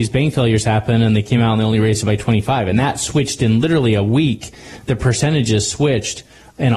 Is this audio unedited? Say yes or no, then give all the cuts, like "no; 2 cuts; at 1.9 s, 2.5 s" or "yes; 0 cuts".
yes; 0 cuts